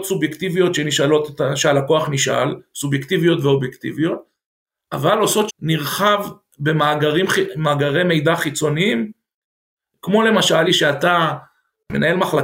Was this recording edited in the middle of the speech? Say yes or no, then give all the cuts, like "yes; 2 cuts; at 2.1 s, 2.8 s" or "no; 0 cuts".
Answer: yes; 2 cuts; at 5.5 s, 10.7 s